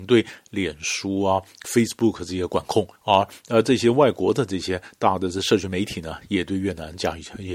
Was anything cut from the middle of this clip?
yes; 2 cuts; at 1.6 s, 3.0 s

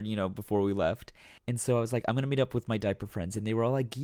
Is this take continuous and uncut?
no; 1 cut; at 1.4 s

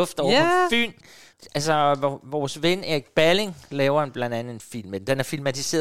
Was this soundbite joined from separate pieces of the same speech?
no; 0 cuts

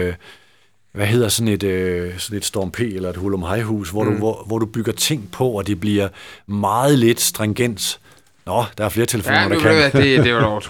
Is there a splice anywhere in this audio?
no; 0 cuts

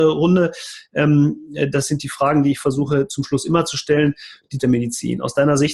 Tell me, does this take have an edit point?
yes; 1 cut; at 4.6 s

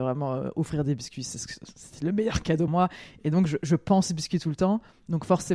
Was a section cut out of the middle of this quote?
yes; 1 cut; at 2.7 s

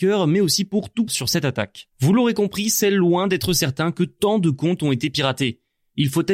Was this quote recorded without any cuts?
no; 2 cuts; at 1.1 s, 1.9 s

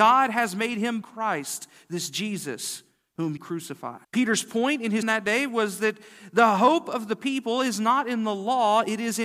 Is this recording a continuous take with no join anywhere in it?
no; 4 cuts; at 1.0 s, 3.4 s, 4.0 s, 5.0 s

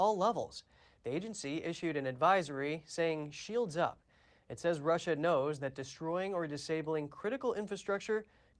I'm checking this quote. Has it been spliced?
no; 0 cuts

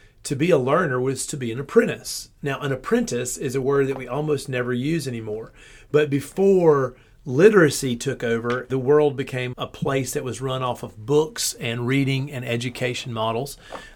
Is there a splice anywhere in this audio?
yes; 2 cuts; at 8.7 s, 9.5 s

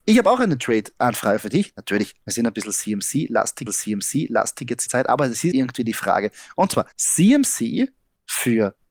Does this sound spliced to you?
yes; 5 cuts; at 2.2 s, 3.7 s, 4.9 s, 5.5 s, 6.9 s

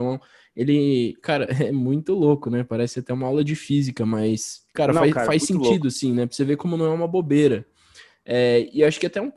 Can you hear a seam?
no; 0 cuts

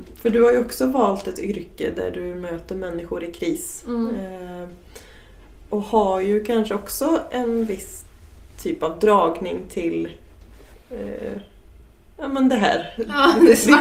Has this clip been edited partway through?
no; 0 cuts

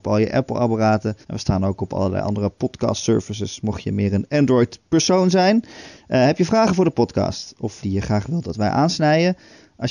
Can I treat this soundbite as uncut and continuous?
no; 2 cuts; at 1.2 s, 7.8 s

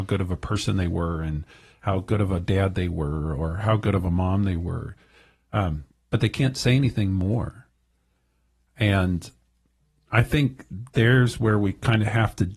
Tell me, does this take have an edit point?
no; 0 cuts

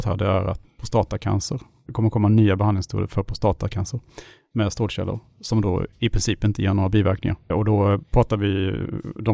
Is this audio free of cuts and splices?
no; 1 cut; at 1.9 s

